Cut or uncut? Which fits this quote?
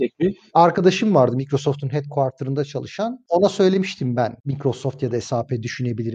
uncut